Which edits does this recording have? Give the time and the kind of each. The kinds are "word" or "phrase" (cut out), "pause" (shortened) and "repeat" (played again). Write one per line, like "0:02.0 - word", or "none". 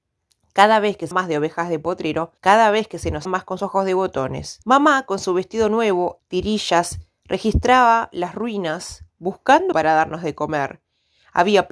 0:01.1 - word
0:02.4 - pause
0:03.2 - word
0:03.6 - word
0:04.6 - pause
0:06.2 - word
0:09.7 - word